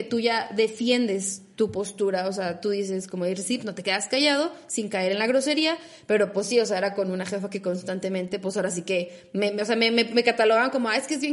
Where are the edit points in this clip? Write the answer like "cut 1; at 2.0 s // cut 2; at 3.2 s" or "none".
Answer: none